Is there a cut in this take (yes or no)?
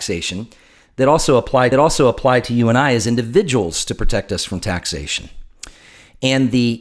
yes